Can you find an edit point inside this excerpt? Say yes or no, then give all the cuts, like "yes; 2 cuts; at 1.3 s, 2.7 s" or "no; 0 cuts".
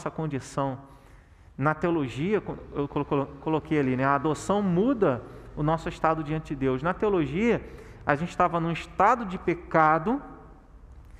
no; 0 cuts